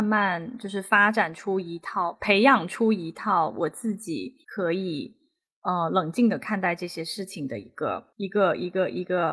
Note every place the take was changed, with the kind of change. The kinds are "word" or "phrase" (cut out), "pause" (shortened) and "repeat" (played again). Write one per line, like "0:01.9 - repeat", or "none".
0:04.4 - pause
0:08.1 - pause